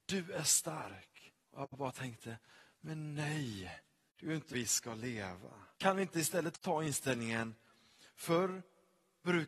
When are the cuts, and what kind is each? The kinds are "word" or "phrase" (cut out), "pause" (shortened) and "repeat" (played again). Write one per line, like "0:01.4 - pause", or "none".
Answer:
0:01.4 - pause
0:04.1 - pause
0:04.5 - word
0:05.7 - pause